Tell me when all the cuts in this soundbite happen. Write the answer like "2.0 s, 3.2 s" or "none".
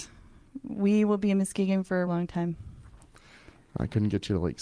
2.1 s